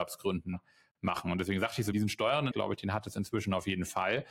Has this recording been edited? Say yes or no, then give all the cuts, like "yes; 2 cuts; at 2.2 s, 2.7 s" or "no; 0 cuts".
yes; 2 cuts; at 1.9 s, 2.5 s